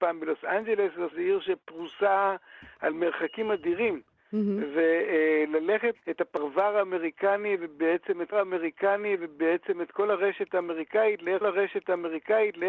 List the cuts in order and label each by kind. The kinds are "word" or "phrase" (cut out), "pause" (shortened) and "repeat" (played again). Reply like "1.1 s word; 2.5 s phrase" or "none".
1.1 s word; 5.9 s phrase; 8.3 s repeat; 11.4 s repeat